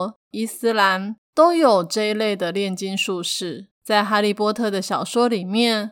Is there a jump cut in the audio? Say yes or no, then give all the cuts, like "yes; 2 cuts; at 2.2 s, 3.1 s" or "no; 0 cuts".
yes; 1 cut; at 3.7 s